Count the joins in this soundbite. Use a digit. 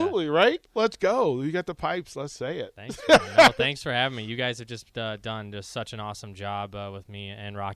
0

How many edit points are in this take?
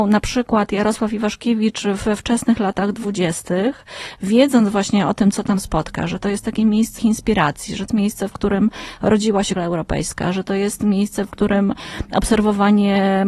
3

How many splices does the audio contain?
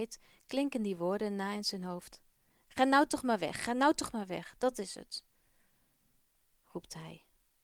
0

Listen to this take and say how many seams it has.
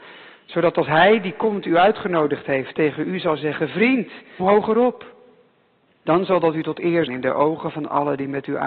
2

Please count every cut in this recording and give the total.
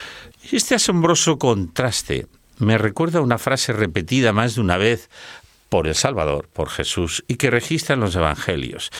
0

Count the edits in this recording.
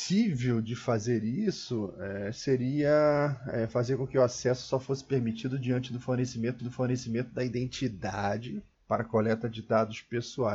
1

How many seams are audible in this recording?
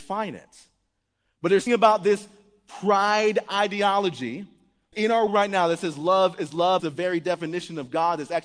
4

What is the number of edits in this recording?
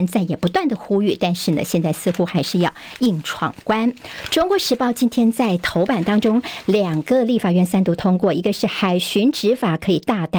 0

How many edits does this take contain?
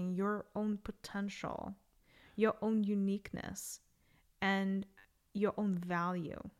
0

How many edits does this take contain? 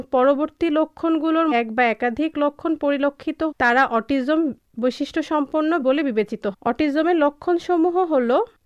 4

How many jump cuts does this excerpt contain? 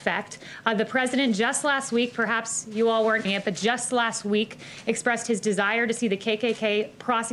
1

